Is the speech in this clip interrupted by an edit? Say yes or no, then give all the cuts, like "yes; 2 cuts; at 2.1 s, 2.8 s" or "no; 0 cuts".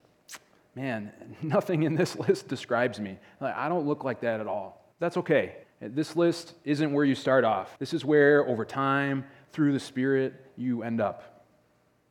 yes; 3 cuts; at 4.9 s, 5.6 s, 7.8 s